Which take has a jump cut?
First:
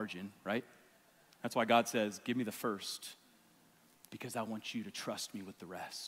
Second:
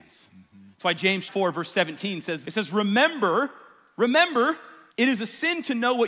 second; 3 cuts; at 1.3 s, 2.4 s, 4.9 s

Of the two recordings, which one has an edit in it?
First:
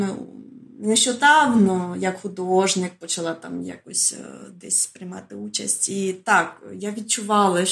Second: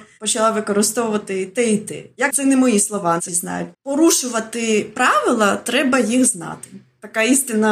second; 3 cuts; at 2.3 s, 3.3 s, 3.7 s

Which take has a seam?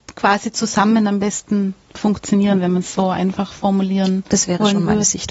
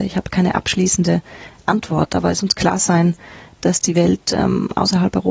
second; 1 cut; at 2.4 s

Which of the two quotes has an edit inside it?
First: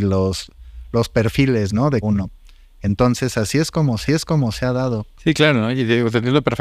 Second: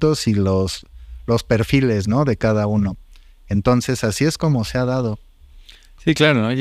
first; 3 cuts; at 2.0 s, 4.1 s, 5.1 s

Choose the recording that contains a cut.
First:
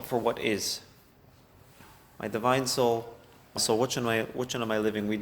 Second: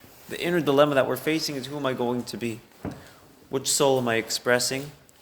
first; 1 cut; at 3.6 s

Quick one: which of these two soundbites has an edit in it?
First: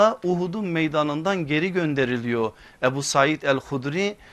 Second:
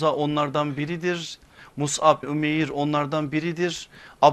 second; 1 cut; at 2.2 s

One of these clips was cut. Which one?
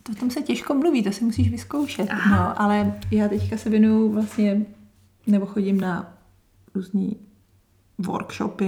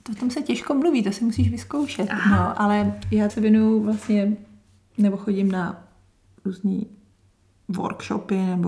second; 1 cut; at 3.3 s

